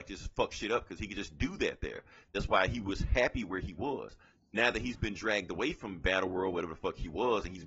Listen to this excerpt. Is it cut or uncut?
uncut